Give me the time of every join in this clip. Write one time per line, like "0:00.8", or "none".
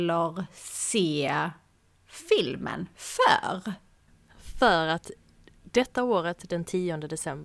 none